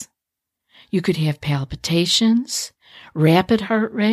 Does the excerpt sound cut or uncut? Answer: uncut